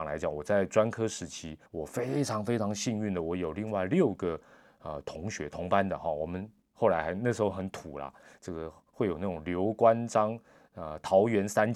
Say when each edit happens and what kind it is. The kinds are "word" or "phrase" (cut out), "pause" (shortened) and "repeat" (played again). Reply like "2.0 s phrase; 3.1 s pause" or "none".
1.7 s pause